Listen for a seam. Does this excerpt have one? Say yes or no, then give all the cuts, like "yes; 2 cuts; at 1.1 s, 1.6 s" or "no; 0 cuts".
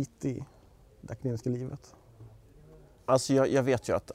no; 0 cuts